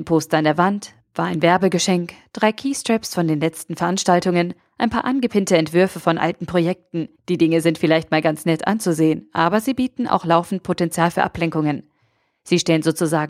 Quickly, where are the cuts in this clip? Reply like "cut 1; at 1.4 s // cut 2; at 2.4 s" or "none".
cut 1; at 7.2 s